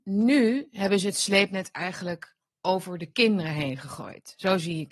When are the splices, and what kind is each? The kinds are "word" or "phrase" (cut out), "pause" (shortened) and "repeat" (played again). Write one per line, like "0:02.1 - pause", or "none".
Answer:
none